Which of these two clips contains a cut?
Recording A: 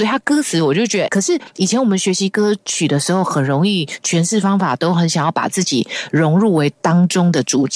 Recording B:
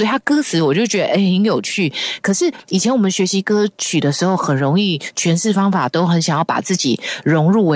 A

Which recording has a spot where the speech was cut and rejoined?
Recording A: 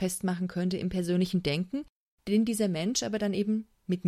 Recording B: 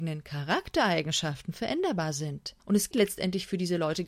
B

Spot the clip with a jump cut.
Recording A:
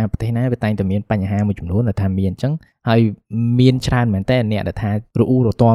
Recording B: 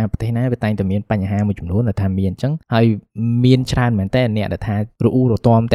B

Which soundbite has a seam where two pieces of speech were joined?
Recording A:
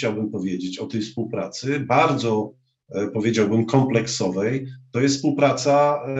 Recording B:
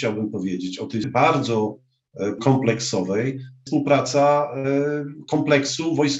B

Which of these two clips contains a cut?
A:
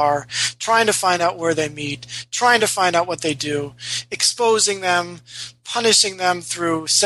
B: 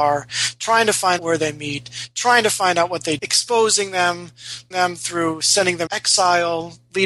B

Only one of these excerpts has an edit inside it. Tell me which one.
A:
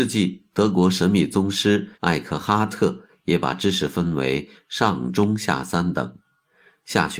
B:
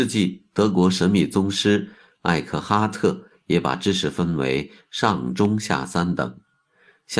A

